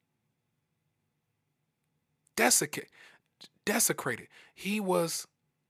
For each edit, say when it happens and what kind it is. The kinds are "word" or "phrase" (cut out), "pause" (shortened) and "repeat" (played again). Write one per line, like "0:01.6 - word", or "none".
none